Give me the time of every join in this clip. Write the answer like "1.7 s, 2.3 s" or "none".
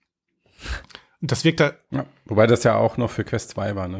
none